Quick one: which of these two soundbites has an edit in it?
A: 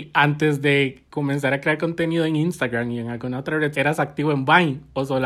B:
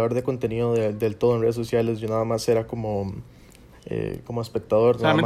A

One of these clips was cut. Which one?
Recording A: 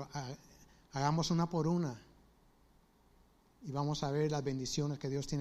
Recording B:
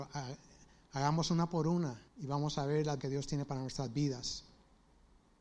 B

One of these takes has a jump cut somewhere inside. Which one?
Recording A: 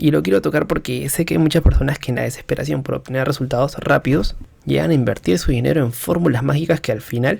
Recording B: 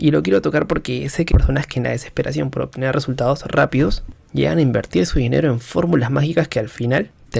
B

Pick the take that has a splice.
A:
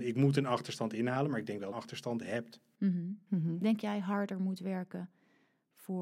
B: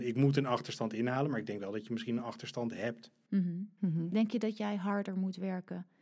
A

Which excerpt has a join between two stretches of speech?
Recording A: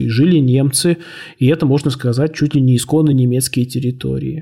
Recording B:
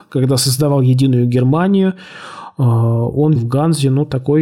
B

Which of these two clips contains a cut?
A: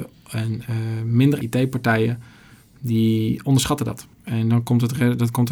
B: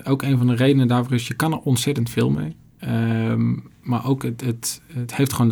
A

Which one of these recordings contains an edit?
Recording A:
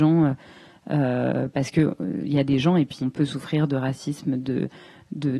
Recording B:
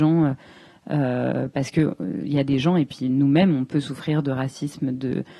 A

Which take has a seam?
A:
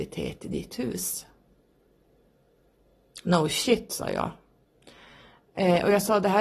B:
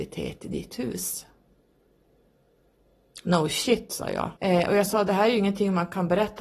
B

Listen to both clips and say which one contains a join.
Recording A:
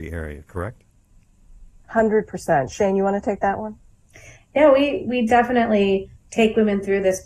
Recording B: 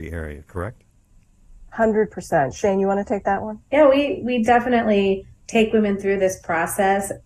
B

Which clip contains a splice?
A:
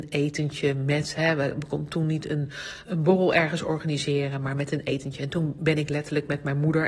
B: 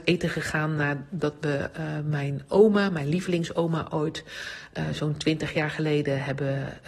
A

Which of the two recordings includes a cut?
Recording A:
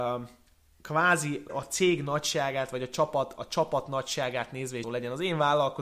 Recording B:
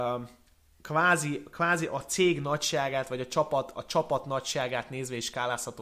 A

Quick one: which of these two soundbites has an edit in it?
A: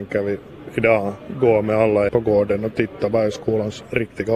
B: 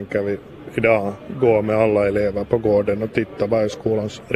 A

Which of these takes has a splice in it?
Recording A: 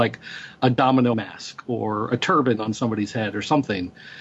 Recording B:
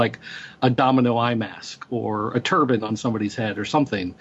A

